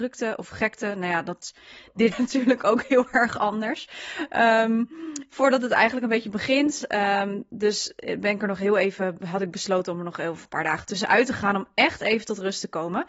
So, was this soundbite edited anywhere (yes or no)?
yes